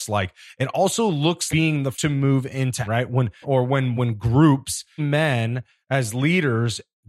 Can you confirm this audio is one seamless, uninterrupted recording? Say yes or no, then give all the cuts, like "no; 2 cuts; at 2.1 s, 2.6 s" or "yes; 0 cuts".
no; 6 cuts; at 1.5 s, 1.9 s, 2.9 s, 3.4 s, 4.0 s, 5.0 s